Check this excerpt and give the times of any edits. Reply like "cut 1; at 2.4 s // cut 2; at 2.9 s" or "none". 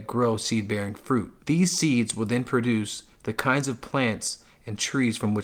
cut 1; at 1.4 s